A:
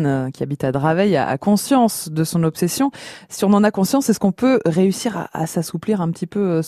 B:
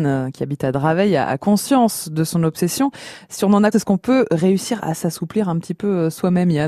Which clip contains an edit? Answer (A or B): B